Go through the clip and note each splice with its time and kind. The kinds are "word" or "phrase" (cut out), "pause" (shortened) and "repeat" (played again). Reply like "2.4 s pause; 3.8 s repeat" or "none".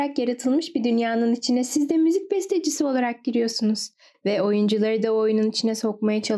none